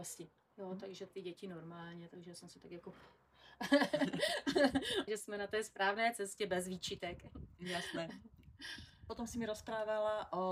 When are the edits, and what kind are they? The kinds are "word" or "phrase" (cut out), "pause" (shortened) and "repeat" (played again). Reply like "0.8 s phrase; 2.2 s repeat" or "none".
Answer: 1.1 s word; 5.1 s word

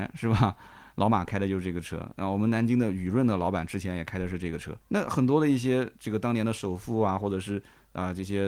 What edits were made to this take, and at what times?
4.8 s pause

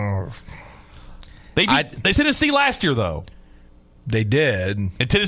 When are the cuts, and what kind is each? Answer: 2.1 s word

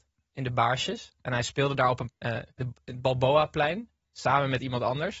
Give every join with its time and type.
2.1 s word; 2.5 s pause

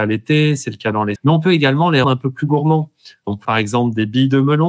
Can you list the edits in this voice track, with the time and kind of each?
1.2 s word; 2.0 s word; 3.4 s word

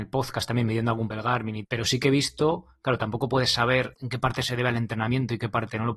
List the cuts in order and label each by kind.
1.1 s word; 1.6 s word; 3.9 s word

